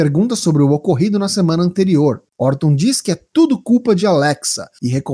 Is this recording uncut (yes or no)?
yes